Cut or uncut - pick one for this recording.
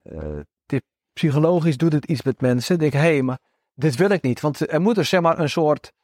uncut